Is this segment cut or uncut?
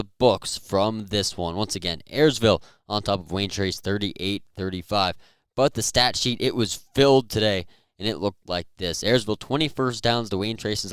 uncut